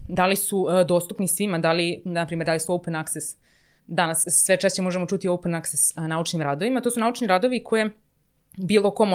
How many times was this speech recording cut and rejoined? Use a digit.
0